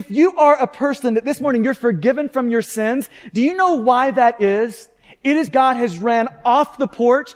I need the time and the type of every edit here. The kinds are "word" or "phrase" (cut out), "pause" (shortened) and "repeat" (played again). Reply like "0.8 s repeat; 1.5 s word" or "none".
5.5 s word